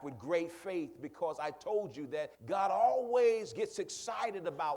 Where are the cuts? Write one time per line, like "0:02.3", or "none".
0:02.3